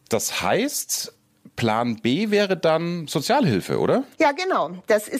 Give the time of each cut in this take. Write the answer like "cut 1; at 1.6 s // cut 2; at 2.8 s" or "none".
cut 1; at 4.1 s